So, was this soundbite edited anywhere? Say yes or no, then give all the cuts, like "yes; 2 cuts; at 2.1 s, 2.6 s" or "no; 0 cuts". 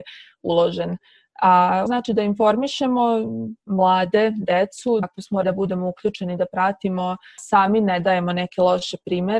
yes; 5 cuts; at 1.9 s, 3.6 s, 5.0 s, 5.4 s, 7.4 s